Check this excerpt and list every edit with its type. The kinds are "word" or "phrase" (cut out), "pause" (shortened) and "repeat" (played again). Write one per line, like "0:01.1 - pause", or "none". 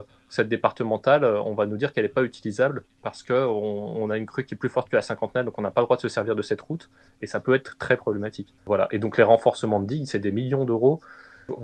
none